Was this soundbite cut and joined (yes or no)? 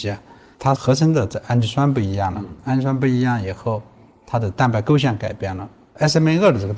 no